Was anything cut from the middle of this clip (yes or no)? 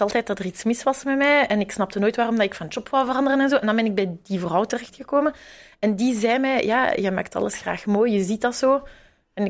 no